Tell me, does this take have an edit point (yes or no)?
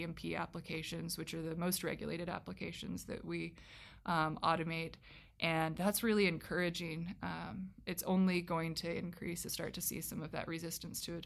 yes